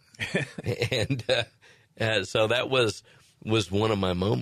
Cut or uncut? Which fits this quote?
uncut